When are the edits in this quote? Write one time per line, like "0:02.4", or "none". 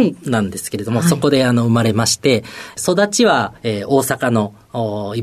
0:03.6